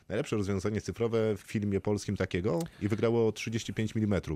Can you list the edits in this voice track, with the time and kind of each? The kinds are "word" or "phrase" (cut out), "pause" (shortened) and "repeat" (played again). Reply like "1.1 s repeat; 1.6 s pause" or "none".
1.4 s phrase; 2.2 s word; 2.7 s pause